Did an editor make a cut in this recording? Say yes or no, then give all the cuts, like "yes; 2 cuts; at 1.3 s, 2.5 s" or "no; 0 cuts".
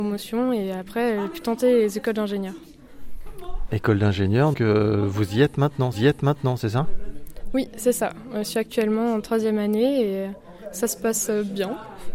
yes; 2 cuts; at 4.5 s, 5.9 s